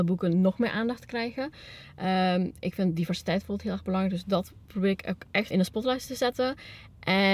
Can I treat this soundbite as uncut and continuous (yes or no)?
no